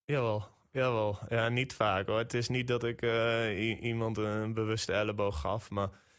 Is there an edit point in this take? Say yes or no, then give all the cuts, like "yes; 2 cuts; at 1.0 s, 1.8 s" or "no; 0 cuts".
no; 0 cuts